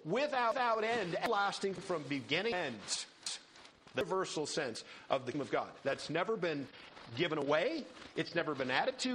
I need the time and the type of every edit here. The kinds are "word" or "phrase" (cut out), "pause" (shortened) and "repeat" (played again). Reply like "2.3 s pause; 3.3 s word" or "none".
1.8 s word; 5.3 s word